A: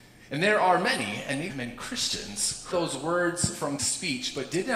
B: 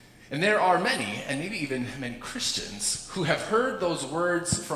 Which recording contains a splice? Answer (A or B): A